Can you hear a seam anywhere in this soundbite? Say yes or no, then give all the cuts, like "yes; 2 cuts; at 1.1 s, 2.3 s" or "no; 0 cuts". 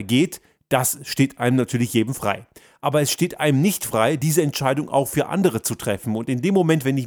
no; 0 cuts